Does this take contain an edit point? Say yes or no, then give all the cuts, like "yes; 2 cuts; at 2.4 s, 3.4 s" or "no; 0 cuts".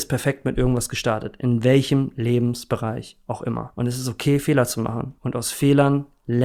yes; 1 cut; at 5.2 s